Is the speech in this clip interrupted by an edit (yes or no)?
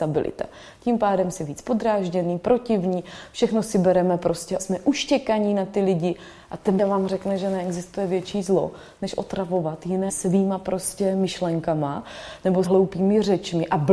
yes